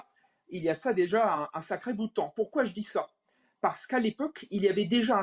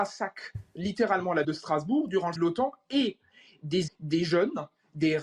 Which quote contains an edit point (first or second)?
second